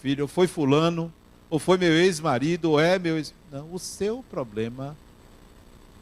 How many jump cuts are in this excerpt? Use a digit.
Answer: 0